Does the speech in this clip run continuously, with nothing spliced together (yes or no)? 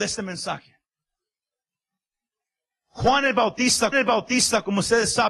no